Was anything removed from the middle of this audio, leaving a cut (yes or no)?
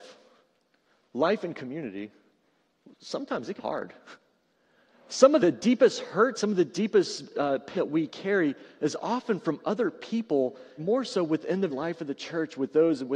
yes